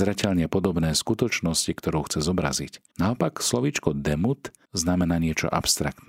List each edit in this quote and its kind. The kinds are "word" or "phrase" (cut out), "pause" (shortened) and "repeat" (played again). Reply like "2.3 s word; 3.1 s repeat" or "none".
2.9 s pause; 4.6 s pause